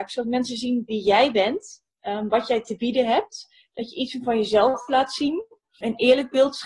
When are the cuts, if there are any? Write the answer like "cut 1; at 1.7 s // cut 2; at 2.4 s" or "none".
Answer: none